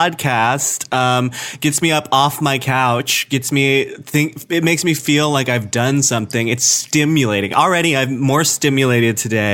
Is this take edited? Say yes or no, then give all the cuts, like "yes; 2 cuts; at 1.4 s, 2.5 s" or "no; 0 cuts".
no; 0 cuts